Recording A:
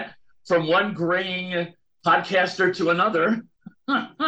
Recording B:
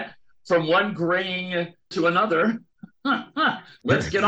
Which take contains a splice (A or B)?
B